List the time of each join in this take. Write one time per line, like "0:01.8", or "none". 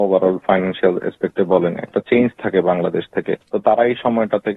0:03.4